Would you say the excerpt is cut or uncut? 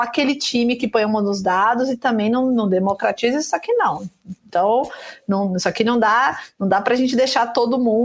uncut